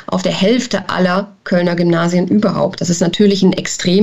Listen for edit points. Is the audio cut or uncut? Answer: uncut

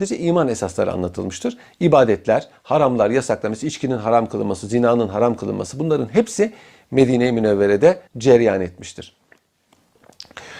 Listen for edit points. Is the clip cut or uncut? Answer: cut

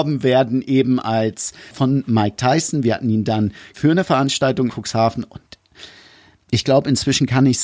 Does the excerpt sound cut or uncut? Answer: cut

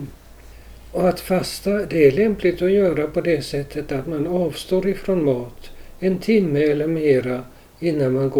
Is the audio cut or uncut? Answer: uncut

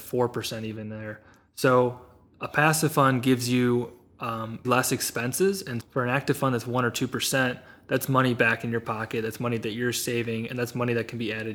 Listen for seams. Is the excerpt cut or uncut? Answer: cut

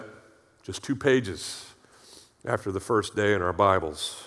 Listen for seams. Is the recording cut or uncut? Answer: uncut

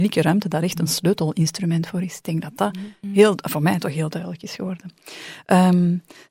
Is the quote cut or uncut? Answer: uncut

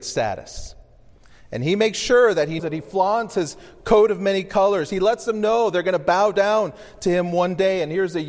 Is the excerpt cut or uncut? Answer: cut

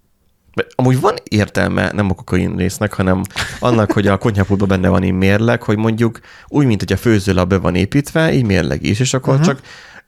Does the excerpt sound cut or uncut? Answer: uncut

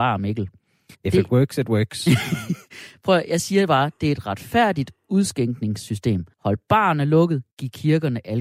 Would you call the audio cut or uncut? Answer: cut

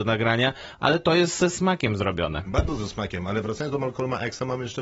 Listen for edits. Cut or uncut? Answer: uncut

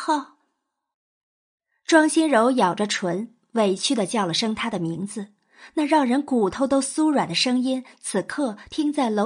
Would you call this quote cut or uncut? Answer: uncut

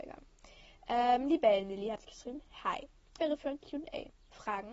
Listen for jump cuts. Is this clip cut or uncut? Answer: cut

